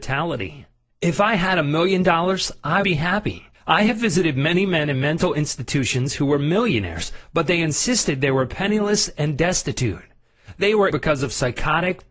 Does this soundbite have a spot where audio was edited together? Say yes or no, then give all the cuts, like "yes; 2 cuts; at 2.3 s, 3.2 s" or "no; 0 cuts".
yes; 3 cuts; at 2.8 s, 3.5 s, 10.9 s